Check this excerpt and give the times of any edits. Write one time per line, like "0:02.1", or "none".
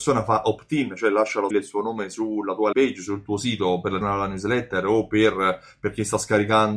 0:01.5
0:02.7
0:04.0

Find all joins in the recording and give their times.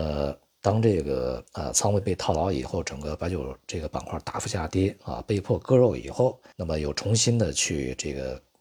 0:01.5
0:06.5

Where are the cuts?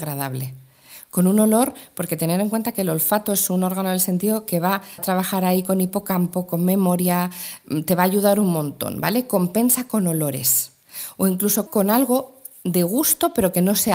0:05.0
0:11.7

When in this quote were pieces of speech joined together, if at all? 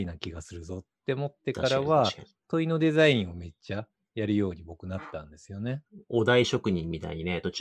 none

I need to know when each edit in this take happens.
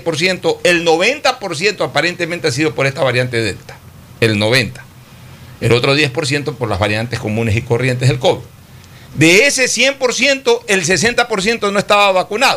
none

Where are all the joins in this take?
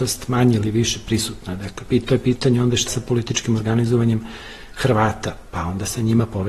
0:02.9

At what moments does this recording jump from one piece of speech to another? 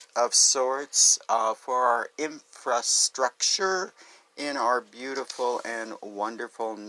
none

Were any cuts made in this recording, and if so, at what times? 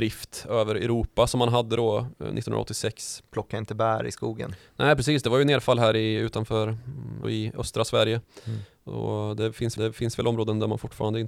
0:03.3
0:07.2
0:09.8

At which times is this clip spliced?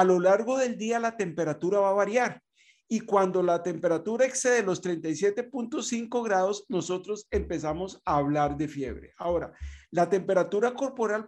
none

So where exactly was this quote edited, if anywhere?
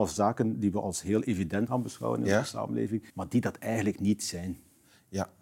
0:01.7
0:03.1

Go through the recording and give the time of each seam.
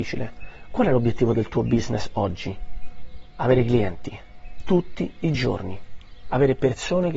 none

